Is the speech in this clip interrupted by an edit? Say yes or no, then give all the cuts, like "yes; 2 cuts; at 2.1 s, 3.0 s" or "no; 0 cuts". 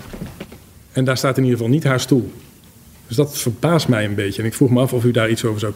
no; 0 cuts